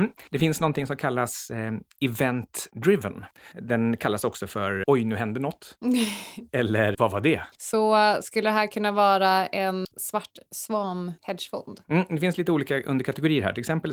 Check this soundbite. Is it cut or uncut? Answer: cut